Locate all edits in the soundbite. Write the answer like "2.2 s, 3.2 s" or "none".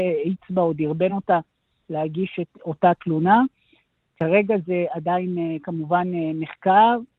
none